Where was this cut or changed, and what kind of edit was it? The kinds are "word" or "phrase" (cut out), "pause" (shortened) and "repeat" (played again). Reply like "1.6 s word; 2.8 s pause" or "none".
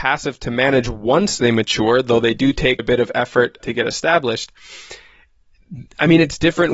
2.8 s word; 3.6 s word